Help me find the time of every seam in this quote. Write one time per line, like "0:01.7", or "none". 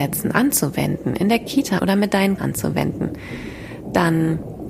0:01.8
0:02.4